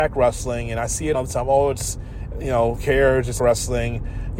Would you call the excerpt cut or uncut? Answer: cut